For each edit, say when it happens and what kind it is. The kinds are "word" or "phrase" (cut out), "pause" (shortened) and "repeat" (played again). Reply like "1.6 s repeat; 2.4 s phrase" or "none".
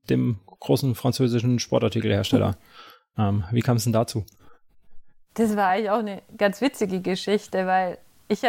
none